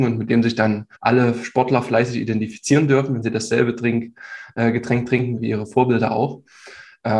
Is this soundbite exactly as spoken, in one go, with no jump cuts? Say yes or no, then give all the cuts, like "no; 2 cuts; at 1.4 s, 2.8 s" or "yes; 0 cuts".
no; 2 cuts; at 0.9 s, 5.4 s